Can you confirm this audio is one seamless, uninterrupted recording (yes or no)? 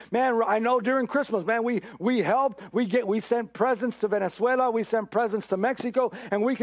yes